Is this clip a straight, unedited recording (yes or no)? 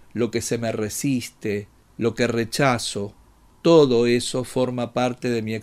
yes